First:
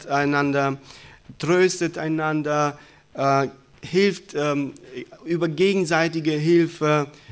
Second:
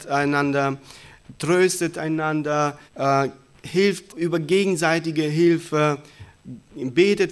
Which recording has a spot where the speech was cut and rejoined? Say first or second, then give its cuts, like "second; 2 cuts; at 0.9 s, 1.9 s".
second; 2 cuts; at 2.9 s, 4.1 s